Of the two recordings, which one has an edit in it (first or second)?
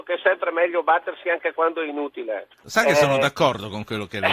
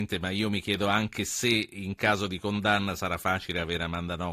first